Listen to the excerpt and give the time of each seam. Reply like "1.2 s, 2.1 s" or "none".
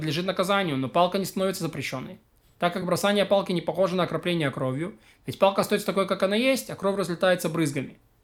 none